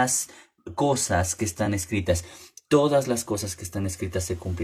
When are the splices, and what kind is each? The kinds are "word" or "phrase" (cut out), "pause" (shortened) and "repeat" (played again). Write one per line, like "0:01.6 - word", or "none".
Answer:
none